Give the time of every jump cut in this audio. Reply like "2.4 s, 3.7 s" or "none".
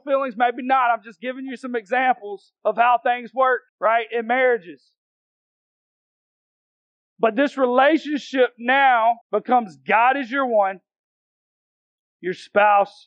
2.6 s, 3.7 s, 9.2 s